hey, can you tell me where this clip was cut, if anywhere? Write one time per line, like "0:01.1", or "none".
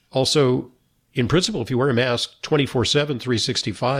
none